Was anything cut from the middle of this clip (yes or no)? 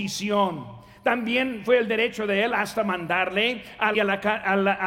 yes